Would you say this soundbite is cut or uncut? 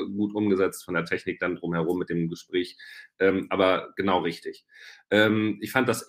uncut